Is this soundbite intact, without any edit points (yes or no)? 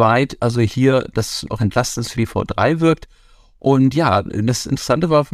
no